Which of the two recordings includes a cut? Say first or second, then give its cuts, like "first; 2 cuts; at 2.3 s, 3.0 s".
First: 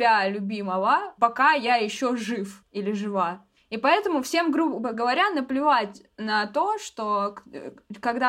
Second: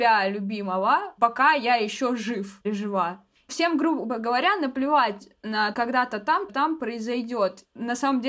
second; 4 cuts; at 2.6 s, 3.5 s, 5.7 s, 6.5 s